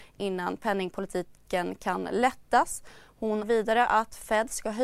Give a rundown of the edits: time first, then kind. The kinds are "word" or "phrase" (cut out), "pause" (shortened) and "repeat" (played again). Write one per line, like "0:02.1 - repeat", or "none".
0:03.4 - word